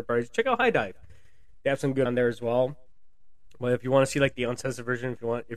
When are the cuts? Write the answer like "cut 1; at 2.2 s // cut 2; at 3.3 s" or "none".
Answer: cut 1; at 2.1 s